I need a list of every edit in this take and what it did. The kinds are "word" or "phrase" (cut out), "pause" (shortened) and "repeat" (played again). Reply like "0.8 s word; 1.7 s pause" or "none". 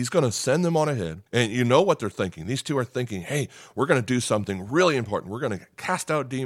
1.3 s pause